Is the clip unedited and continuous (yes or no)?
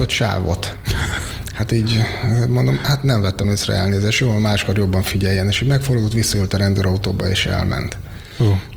yes